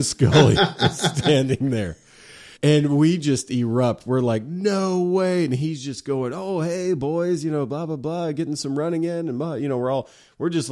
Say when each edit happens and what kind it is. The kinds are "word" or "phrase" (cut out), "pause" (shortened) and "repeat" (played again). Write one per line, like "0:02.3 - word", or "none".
0:02.6 - pause